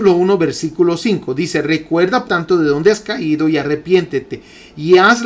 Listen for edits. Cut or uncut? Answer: cut